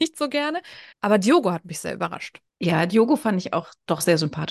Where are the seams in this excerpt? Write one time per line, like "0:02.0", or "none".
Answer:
0:00.9
0:02.5